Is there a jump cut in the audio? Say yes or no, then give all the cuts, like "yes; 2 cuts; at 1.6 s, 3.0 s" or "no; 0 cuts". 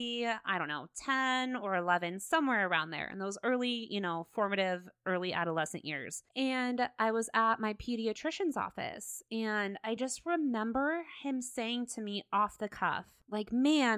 no; 0 cuts